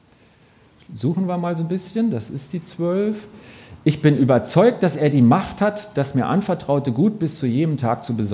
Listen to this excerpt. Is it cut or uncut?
uncut